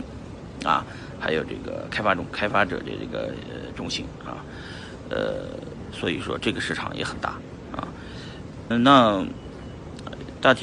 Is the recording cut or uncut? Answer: cut